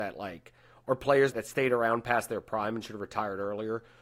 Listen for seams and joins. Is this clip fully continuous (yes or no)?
no